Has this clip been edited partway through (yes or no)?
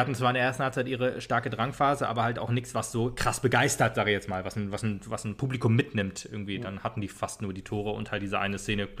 no